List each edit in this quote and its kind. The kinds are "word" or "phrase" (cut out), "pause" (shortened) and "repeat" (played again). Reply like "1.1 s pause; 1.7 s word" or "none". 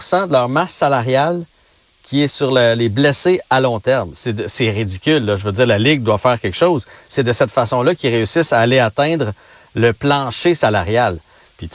none